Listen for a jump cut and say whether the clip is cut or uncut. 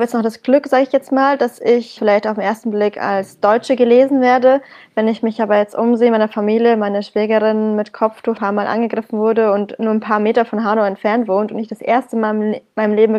cut